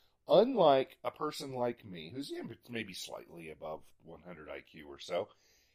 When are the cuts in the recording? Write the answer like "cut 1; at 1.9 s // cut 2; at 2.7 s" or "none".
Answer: none